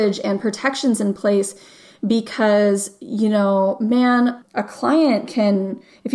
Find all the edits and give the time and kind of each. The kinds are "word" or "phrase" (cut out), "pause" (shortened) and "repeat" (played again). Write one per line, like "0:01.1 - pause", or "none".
none